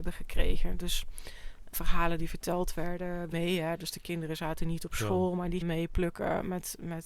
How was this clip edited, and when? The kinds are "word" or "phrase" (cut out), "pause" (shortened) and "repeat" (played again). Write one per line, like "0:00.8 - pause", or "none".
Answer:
0:01.7 - word
0:03.3 - word
0:05.6 - word